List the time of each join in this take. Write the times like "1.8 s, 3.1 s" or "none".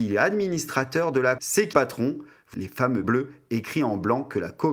1.4 s, 1.7 s, 2.5 s, 3.0 s